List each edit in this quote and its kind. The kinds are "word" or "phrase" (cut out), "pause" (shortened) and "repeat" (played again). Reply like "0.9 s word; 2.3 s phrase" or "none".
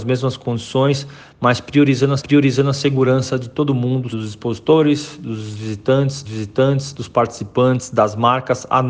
2.2 s repeat; 4.1 s word; 6.2 s repeat